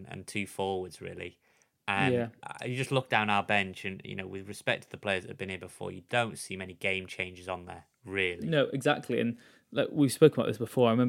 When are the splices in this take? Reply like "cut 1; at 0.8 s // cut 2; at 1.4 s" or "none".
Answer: none